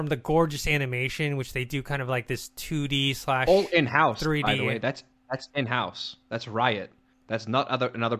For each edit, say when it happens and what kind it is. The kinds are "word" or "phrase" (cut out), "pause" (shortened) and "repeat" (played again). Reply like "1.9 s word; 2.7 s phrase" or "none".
none